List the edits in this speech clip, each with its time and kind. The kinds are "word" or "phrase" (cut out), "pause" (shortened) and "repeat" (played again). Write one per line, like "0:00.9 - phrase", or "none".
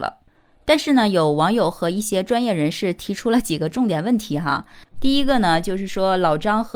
0:04.9 - pause